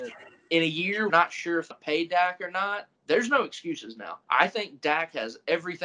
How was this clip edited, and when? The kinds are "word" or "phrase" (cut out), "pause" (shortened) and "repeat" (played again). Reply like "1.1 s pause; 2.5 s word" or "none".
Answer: 1.1 s phrase; 1.7 s word; 3.0 s pause; 4.2 s pause